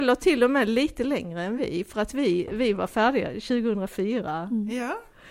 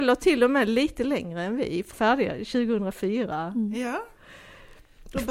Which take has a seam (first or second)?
second